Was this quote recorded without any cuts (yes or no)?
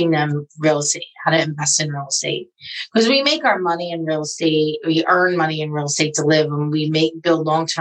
yes